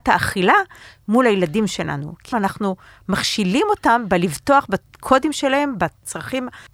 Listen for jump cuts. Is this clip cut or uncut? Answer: cut